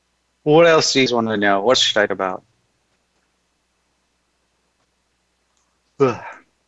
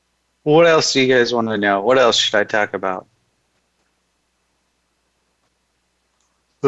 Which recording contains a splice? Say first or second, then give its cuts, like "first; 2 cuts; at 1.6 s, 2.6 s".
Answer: first; 3 cuts; at 1.1 s, 1.7 s, 2.1 s